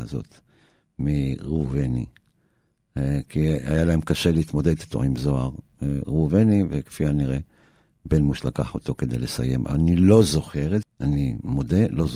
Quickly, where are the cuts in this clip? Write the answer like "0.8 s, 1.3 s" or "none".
10.8 s